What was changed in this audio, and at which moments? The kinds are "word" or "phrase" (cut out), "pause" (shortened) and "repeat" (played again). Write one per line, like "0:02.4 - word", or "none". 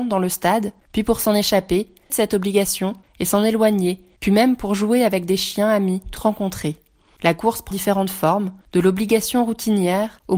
0:02.1 - word
0:06.2 - word
0:07.7 - word
0:08.6 - pause